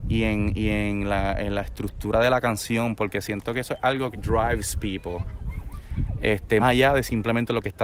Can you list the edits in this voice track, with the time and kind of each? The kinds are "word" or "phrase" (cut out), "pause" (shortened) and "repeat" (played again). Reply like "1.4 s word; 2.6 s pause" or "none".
4.1 s word; 6.6 s word

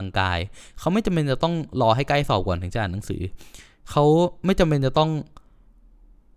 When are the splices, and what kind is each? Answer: none

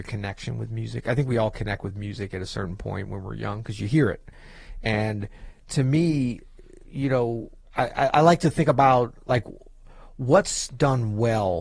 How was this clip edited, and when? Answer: 7.6 s pause

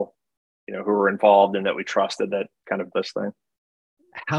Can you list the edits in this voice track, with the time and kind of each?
2.9 s word

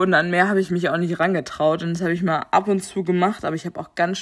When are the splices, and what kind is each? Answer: none

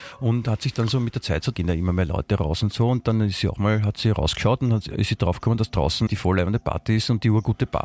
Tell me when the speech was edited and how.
1.5 s phrase; 6.1 s word

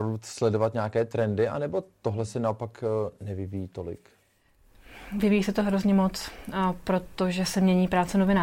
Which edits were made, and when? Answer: none

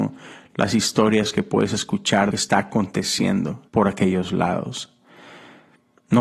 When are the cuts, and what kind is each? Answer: 2.3 s phrase; 3.7 s pause

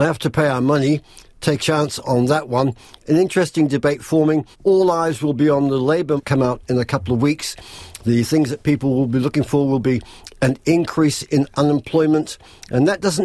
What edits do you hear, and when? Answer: 1.6 s word; 4.5 s pause; 6.2 s phrase

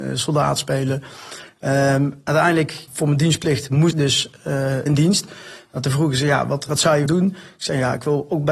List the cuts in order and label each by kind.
2.9 s word; 3.9 s word; 4.9 s word; 6.7 s word; 7.1 s word

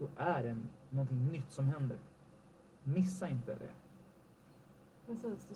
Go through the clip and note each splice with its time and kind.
none

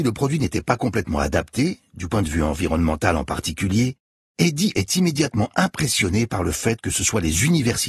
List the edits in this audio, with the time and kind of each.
none

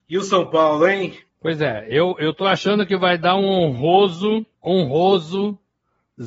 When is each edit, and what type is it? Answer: 1.3 s pause; 4.5 s pause

